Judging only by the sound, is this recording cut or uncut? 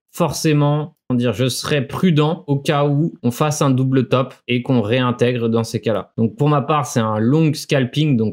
cut